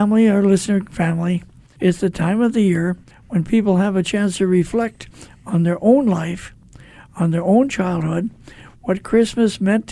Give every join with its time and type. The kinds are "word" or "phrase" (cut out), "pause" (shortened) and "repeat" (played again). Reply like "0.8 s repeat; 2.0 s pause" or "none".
none